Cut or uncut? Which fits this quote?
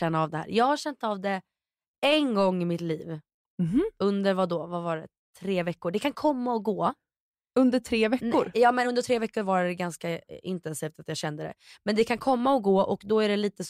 uncut